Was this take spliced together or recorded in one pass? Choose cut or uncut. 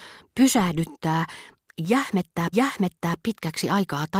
cut